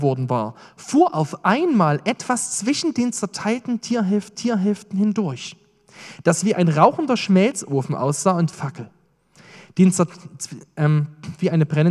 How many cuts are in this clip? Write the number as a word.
two